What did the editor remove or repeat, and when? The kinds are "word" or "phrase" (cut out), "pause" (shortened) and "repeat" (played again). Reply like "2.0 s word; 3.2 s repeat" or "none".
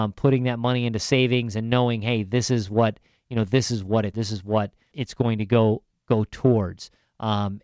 4.1 s word; 4.9 s word